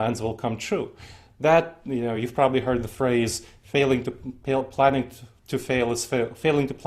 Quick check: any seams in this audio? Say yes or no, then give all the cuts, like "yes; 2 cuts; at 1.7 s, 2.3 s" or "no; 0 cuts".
no; 0 cuts